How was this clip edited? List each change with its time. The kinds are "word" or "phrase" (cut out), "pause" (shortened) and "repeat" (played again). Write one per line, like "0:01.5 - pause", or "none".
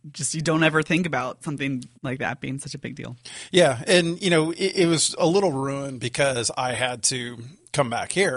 0:01.9 - pause